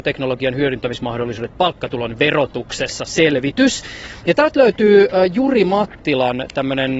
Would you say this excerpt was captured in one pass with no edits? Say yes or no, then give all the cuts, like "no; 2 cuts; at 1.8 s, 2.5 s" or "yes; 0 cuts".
yes; 0 cuts